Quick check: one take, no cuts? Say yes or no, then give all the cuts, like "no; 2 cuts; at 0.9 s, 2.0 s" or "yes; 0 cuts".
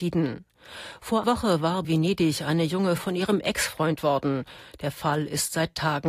no; 4 cuts; at 1.2 s, 1.8 s, 3.0 s, 4.0 s